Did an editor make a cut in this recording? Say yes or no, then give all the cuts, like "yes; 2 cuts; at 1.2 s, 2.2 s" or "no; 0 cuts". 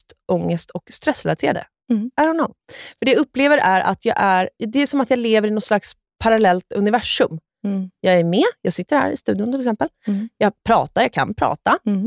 no; 0 cuts